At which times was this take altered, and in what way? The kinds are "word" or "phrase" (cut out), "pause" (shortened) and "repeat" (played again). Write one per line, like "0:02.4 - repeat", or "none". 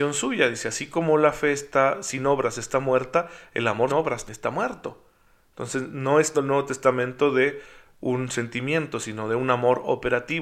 0:03.9 - word
0:04.3 - word
0:06.3 - word